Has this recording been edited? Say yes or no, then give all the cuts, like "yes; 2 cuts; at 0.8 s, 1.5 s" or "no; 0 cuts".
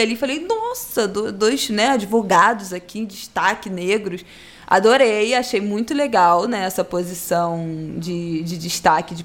no; 0 cuts